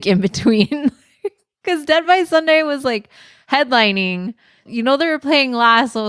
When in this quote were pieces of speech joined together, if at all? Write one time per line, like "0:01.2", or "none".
none